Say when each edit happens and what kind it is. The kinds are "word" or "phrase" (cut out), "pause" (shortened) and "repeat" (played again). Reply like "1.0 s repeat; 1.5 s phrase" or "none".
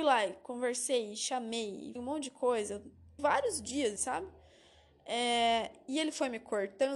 2.0 s word; 3.2 s word; 4.0 s word